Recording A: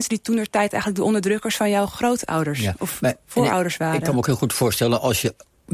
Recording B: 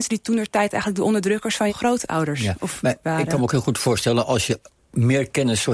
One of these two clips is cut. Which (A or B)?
B